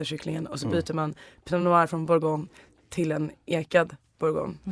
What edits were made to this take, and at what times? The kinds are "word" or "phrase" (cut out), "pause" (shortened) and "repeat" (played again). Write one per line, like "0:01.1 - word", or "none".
none